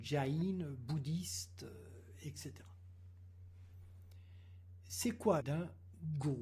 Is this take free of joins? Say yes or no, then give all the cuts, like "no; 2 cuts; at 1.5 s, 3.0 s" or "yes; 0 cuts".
no; 1 cut; at 5.4 s